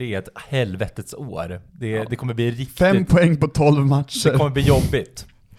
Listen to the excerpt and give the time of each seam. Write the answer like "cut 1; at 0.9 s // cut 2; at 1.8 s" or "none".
cut 1; at 1.7 s

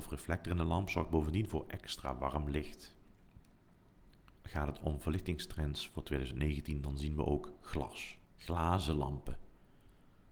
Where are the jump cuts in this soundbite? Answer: cut 1; at 4.4 s // cut 2; at 8.2 s

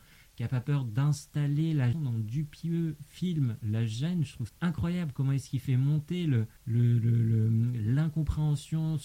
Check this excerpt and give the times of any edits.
cut 1; at 1.9 s // cut 2; at 4.5 s // cut 3; at 6.6 s

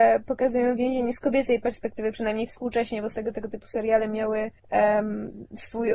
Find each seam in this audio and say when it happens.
cut 1; at 3.3 s // cut 2; at 4.6 s

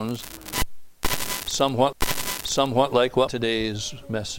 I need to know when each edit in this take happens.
cut 1; at 1.9 s // cut 2; at 3.3 s

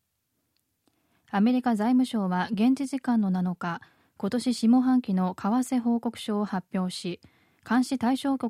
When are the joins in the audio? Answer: none

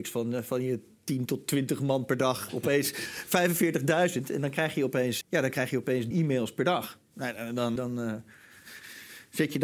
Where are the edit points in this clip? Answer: cut 1; at 5.2 s // cut 2; at 6.1 s // cut 3; at 7.8 s

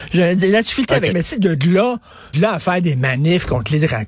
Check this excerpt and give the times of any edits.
cut 1; at 1.1 s // cut 2; at 2.3 s

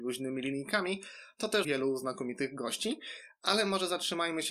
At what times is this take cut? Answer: cut 1; at 1.6 s

